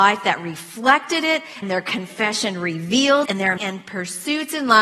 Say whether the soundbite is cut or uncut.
cut